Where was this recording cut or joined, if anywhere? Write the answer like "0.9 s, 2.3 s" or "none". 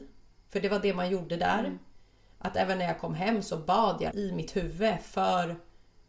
4.1 s